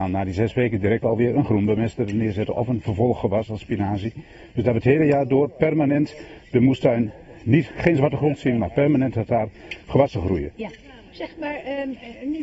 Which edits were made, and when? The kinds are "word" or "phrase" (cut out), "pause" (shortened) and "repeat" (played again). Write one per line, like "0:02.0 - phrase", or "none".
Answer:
0:10.5 - pause